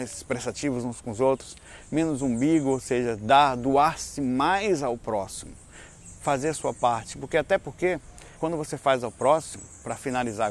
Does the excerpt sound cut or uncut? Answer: cut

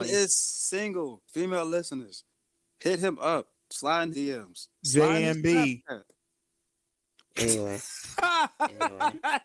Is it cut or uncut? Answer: cut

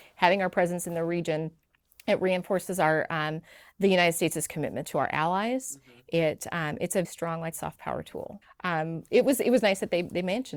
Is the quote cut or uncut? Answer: cut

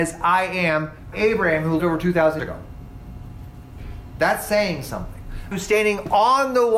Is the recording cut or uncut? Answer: cut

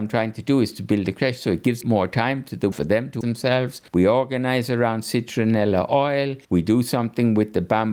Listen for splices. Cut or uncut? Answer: cut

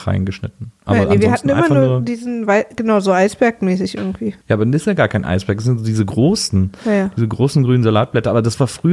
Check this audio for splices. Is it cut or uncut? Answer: cut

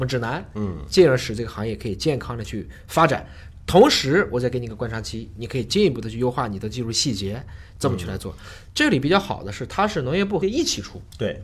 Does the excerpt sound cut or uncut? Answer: cut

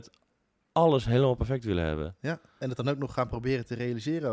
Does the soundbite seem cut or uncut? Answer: uncut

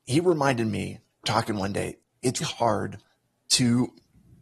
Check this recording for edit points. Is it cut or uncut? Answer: cut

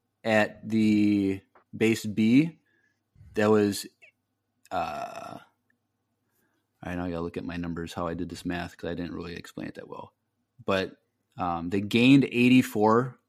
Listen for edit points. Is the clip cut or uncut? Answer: uncut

